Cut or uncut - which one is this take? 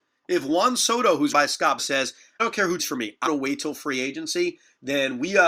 cut